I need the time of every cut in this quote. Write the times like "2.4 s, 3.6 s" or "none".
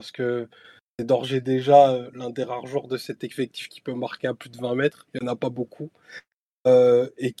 5.1 s